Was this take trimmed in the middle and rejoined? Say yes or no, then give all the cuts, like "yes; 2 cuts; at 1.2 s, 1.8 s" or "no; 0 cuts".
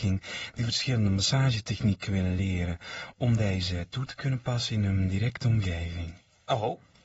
no; 0 cuts